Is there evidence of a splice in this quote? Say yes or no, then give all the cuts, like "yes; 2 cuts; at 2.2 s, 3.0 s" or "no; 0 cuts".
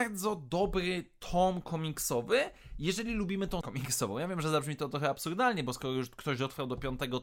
yes; 1 cut; at 3.6 s